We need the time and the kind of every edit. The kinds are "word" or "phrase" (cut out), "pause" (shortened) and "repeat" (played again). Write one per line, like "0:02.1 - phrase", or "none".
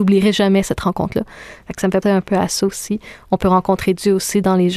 0:02.0 - word